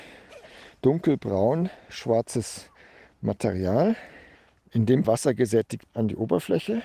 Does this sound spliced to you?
yes; 3 cuts; at 4.3 s, 5.0 s, 5.9 s

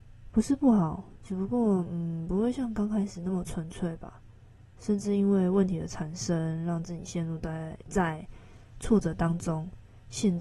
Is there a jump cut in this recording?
no; 0 cuts

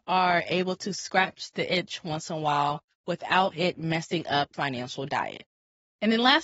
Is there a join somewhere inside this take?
yes; 1 cut; at 4.5 s

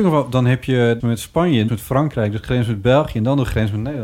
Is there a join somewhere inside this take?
yes; 2 cuts; at 1.0 s, 1.7 s

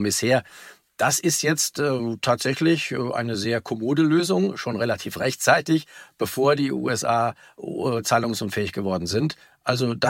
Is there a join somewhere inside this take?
no; 0 cuts

